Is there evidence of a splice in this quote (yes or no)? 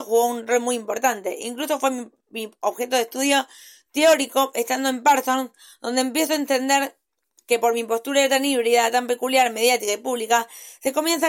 no